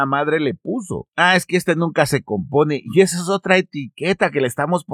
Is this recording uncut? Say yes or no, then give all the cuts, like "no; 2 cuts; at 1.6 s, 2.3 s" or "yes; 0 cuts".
yes; 0 cuts